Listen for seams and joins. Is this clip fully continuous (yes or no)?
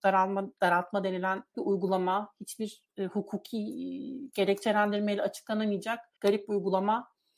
no